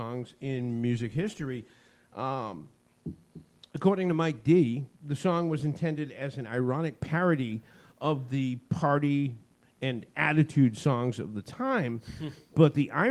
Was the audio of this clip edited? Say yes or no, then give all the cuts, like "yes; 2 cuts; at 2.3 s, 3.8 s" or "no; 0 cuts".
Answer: no; 0 cuts